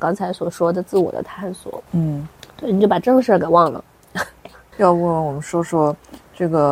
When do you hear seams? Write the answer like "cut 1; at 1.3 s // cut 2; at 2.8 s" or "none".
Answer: cut 1; at 1.9 s // cut 2; at 4.7 s